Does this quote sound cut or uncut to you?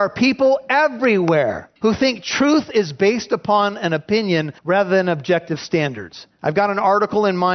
cut